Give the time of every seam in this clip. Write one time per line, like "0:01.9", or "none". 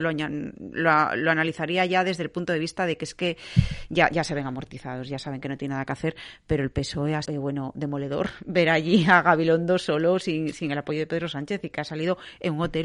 0:07.2